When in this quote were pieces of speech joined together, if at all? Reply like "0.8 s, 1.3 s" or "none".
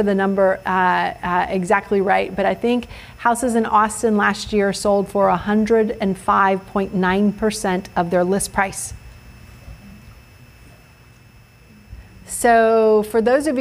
none